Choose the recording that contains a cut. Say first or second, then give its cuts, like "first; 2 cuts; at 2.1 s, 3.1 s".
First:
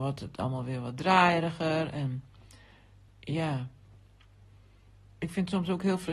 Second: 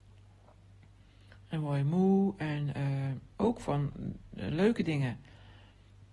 first; 1 cut; at 3.1 s